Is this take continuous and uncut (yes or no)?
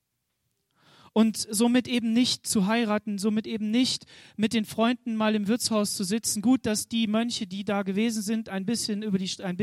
yes